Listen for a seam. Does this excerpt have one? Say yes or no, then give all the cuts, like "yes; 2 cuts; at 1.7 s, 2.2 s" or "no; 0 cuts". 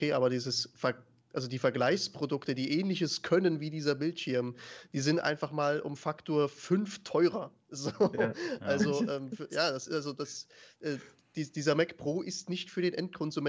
no; 0 cuts